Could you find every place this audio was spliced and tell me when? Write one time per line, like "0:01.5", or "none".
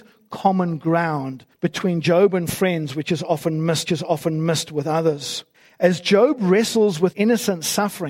0:01.5
0:03.8
0:05.5
0:07.1